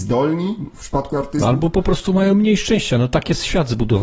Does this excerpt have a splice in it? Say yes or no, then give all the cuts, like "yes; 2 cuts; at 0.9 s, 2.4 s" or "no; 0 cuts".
no; 0 cuts